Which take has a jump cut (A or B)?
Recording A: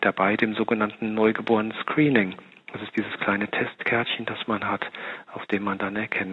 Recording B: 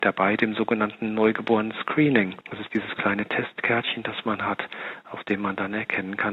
B